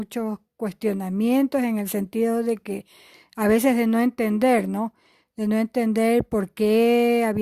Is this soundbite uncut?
yes; 0 cuts

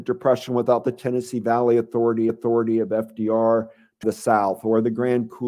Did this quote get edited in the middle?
yes; 2 cuts; at 2.3 s, 4.0 s

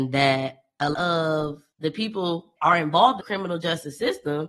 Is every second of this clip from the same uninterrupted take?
no; 4 cuts; at 0.9 s, 1.7 s, 2.6 s, 3.2 s

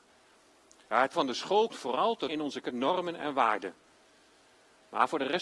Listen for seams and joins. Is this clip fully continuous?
no; 4 cuts; at 1.1 s, 1.7 s, 2.3 s, 2.6 s

